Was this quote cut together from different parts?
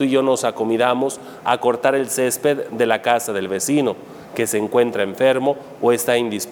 no; 0 cuts

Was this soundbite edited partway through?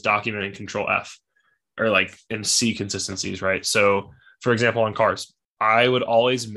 no; 0 cuts

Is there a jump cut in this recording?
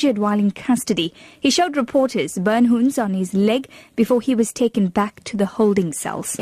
no; 0 cuts

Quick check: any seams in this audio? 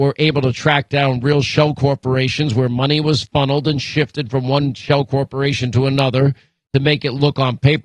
no; 0 cuts

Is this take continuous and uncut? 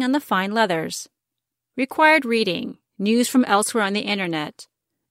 yes; 0 cuts

